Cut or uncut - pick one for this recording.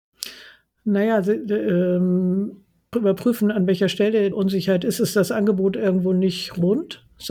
cut